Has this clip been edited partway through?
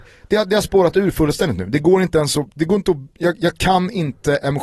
no; 0 cuts

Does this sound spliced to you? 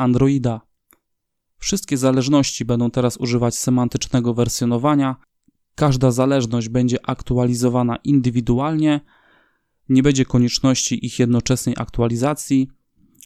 no; 0 cuts

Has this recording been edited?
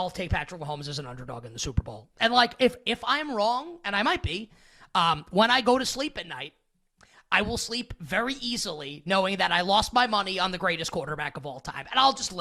no; 0 cuts

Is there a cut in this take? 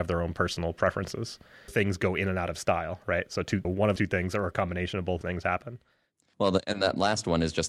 yes; 4 cuts; at 1.7 s, 3.6 s, 4.0 s, 5.2 s

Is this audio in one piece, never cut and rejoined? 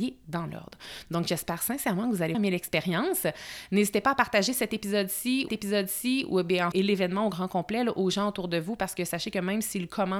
no; 3 cuts; at 2.3 s, 5.5 s, 6.7 s

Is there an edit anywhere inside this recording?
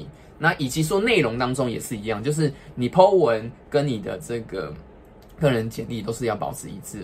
no; 0 cuts

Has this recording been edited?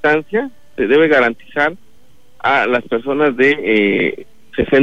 no; 0 cuts

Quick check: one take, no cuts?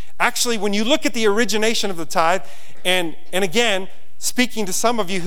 yes; 0 cuts

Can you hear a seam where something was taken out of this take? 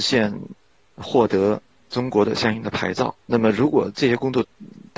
yes; 1 cut; at 3.2 s

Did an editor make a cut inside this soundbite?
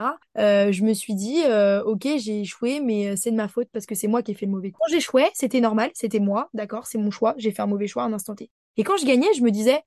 no; 0 cuts

